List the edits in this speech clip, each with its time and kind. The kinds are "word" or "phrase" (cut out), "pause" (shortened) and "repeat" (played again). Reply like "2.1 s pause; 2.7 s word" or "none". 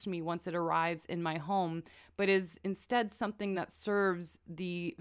none